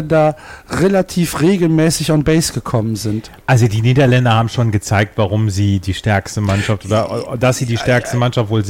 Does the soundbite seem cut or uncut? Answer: uncut